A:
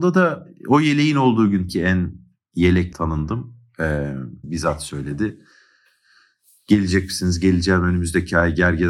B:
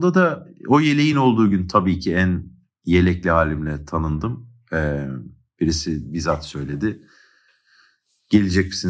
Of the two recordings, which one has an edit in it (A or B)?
A